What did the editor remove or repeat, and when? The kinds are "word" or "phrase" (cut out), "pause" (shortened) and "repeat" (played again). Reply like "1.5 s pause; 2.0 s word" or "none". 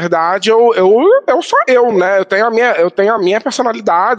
none